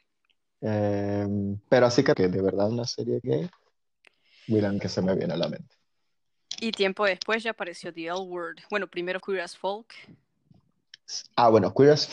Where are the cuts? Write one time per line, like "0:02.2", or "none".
0:01.6
0:02.1
0:03.2
0:04.8
0:09.2